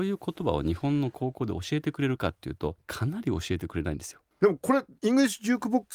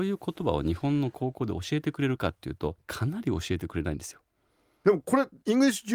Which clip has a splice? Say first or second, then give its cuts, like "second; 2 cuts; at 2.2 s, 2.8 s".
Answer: first; 1 cut; at 4.3 s